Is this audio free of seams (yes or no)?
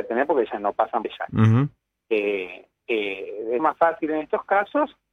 no